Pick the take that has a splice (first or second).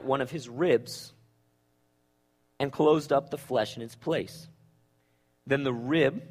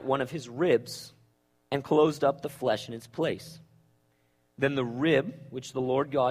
second